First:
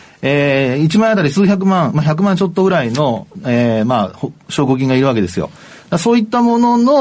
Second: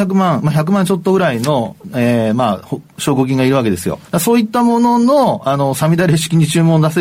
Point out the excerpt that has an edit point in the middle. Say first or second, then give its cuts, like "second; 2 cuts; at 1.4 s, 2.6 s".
second; 1 cut; at 4.1 s